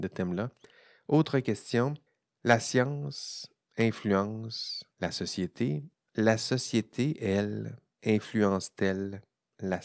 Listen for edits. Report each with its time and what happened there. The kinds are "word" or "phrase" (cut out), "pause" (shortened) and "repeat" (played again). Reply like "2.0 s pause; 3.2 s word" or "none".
2.1 s pause; 4.9 s pause; 5.9 s pause; 7.9 s pause

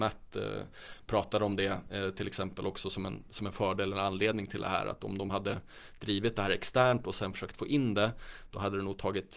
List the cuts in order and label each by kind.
none

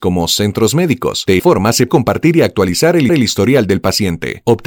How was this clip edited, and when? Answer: 1.4 s word; 1.9 s word; 3.1 s repeat

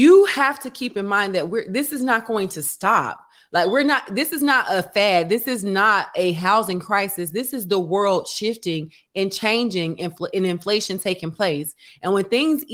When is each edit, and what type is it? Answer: none

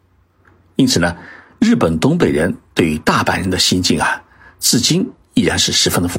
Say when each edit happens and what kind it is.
none

